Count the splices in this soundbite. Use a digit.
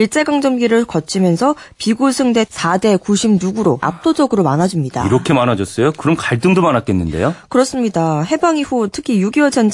2